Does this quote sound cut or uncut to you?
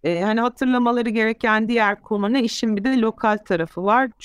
uncut